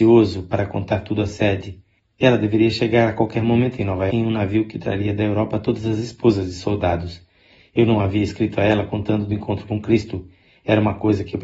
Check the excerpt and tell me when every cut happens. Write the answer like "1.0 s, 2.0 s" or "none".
4.1 s, 9.3 s

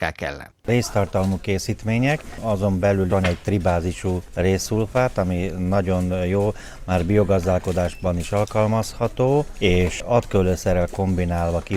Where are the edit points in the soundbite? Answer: 3.1 s

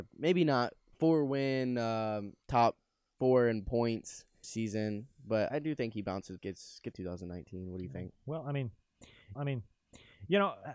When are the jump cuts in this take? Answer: 0.9 s, 2.4 s, 5.5 s, 6.4 s, 6.9 s, 8.1 s, 9.4 s

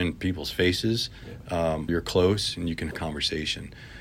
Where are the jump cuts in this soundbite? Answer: 1.9 s, 2.9 s

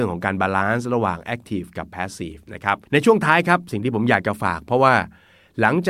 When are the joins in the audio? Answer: 2.9 s

